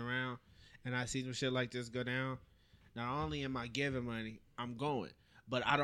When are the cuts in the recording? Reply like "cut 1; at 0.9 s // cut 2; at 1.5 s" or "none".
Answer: none